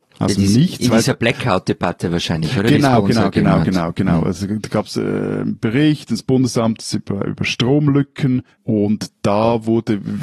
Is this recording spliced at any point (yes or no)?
yes